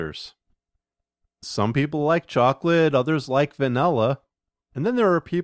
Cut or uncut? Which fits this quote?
cut